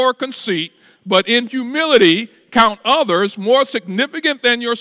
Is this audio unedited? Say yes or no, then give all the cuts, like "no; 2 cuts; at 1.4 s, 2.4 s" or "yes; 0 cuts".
yes; 0 cuts